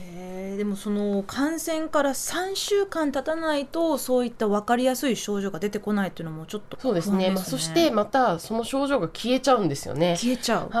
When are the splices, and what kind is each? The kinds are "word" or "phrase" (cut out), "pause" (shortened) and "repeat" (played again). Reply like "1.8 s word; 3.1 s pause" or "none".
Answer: 6.7 s word